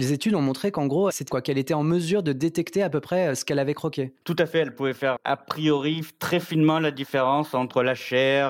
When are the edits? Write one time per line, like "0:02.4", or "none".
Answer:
0:01.3
0:05.2